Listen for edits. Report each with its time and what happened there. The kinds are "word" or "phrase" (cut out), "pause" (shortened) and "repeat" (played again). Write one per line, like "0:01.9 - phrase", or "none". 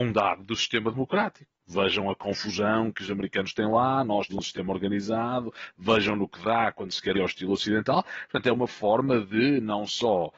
0:04.3 - word
0:07.1 - phrase